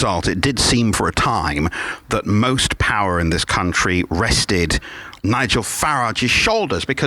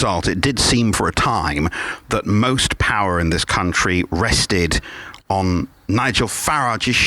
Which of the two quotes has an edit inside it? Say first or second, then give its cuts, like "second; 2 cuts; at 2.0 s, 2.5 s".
first; 1 cut; at 5.2 s